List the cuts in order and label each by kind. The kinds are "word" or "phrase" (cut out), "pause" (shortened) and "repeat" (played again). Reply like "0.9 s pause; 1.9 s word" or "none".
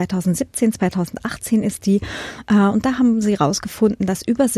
none